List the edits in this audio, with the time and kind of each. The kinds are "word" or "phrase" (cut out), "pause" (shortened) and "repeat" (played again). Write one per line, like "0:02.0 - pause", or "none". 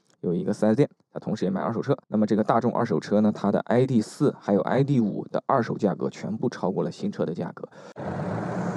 0:02.0 - pause